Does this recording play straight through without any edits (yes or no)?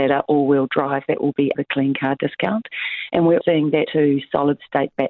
no